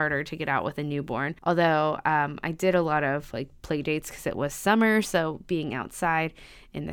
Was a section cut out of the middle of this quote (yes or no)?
yes